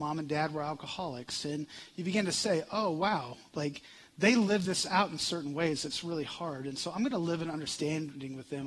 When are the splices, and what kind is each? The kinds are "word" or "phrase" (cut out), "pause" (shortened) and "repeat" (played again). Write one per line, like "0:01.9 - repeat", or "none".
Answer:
none